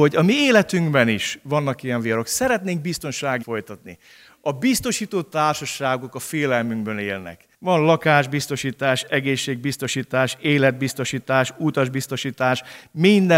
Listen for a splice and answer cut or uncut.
cut